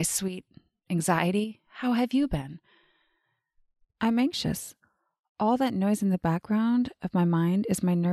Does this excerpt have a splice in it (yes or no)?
no